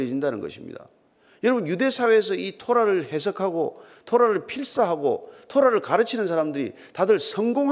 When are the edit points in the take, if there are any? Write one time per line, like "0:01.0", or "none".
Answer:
none